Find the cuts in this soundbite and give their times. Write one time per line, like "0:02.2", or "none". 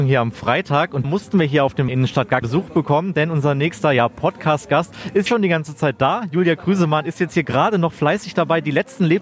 0:01.0
0:01.9
0:02.4
0:05.3